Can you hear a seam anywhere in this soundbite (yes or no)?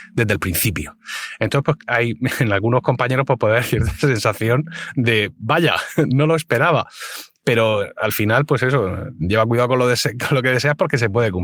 no